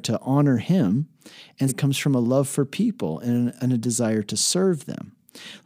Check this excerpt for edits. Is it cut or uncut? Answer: cut